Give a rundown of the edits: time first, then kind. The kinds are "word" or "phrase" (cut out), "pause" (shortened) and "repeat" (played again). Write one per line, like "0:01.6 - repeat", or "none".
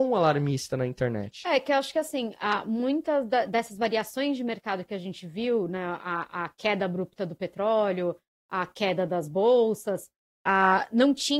none